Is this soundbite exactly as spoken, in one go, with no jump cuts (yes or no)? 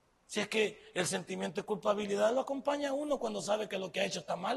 yes